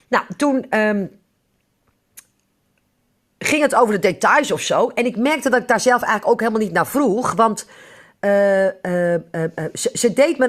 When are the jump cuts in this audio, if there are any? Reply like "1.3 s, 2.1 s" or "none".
none